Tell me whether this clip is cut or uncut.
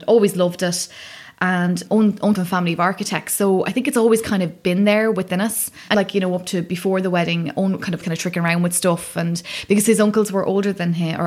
cut